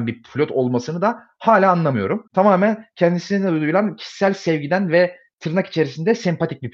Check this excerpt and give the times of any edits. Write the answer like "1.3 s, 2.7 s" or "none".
2.3 s